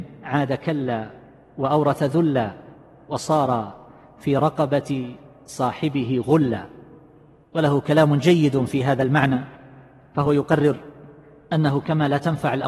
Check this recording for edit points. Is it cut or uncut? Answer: uncut